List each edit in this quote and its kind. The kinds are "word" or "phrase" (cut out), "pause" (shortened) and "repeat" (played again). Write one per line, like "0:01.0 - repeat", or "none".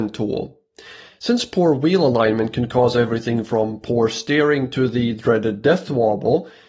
none